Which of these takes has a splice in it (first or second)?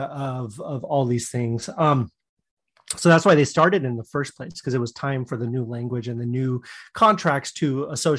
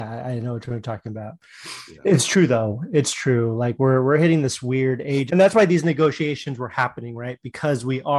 second